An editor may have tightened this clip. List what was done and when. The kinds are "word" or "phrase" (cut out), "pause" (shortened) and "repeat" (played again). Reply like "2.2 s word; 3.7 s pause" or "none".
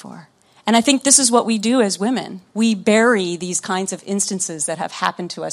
2.5 s pause